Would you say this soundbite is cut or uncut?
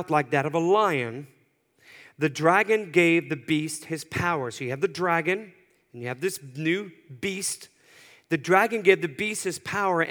uncut